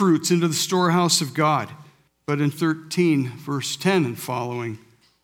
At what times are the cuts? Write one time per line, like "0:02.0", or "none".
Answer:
0:02.1
0:02.5